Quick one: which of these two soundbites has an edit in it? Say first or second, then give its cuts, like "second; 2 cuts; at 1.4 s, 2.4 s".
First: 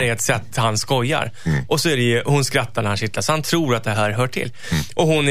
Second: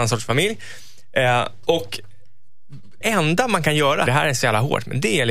second; 2 cuts; at 3.0 s, 4.1 s